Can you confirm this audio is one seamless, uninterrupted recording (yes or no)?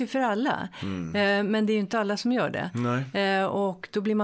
yes